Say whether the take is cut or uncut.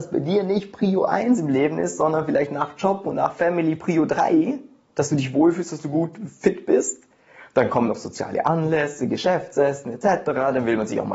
uncut